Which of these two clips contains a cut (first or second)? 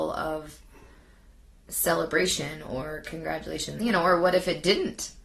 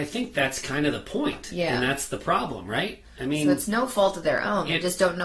first